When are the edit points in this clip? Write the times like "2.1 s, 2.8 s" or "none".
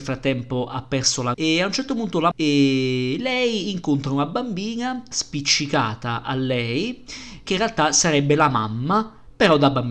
1.3 s, 2.3 s, 5.1 s, 7.5 s